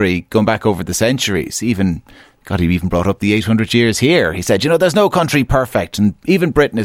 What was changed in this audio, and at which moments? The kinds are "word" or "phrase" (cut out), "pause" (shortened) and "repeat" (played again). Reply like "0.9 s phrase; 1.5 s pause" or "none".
none

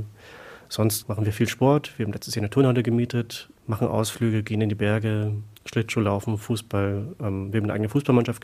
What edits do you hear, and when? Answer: 3.6 s pause; 5.6 s pause

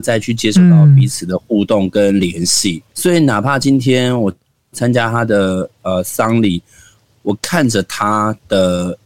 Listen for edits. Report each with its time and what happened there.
2.9 s pause

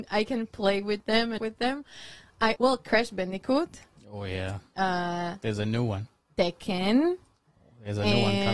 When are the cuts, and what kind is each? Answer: 1.4 s phrase; 2.6 s word

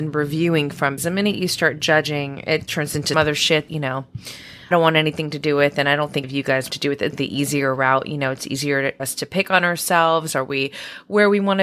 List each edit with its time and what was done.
1.0 s word; 2.7 s word; 3.1 s word; 3.7 s word; 4.7 s word; 6.2 s word; 6.7 s word; 7.1 s word; 9.0 s word

